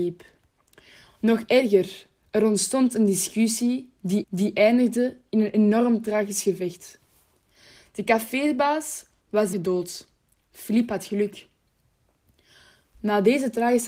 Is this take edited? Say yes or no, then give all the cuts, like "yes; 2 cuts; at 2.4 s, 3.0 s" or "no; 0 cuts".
yes; 2 cuts; at 4.2 s, 9.5 s